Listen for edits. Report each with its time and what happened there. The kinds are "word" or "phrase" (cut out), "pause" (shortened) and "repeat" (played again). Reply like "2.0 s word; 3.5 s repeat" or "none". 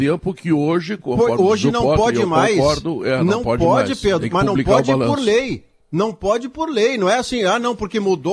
none